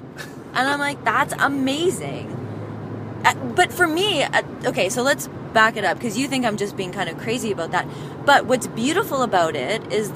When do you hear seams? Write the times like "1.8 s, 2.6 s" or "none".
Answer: none